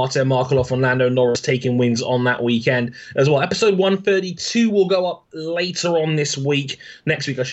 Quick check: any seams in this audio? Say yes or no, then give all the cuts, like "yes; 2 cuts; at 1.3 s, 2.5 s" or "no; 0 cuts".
no; 0 cuts